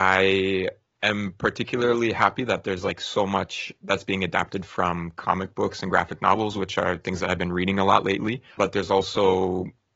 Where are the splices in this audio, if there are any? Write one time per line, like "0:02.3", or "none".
0:08.5